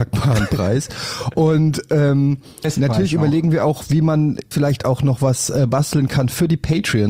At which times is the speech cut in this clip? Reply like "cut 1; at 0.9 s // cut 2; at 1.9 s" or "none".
cut 1; at 4.5 s